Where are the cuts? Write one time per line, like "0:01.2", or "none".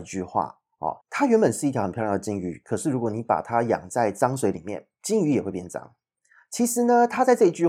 0:01.0

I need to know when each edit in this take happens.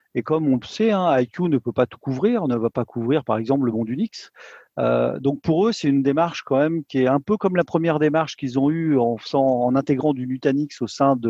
none

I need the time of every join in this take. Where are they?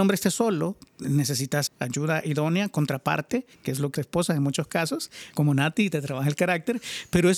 0:01.7
0:03.5
0:04.0
0:05.3

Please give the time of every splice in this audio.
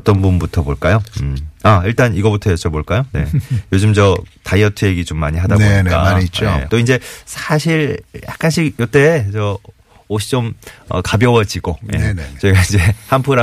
0:06.7

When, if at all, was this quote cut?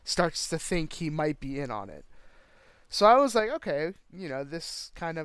none

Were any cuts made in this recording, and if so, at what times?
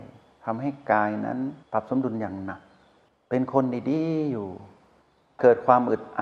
0:01.6

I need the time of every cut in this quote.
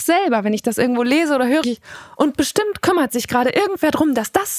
0:01.6
0:02.2

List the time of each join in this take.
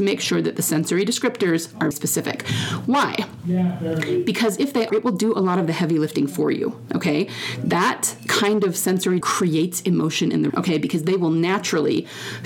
0:01.9
0:04.9
0:09.2
0:10.5

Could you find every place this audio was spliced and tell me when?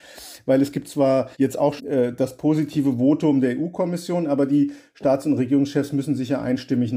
0:01.3
0:01.8

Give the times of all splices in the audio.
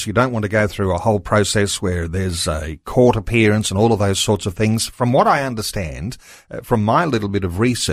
none

